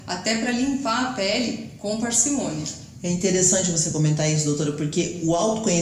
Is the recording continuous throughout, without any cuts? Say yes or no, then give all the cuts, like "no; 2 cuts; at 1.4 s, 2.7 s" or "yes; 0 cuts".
yes; 0 cuts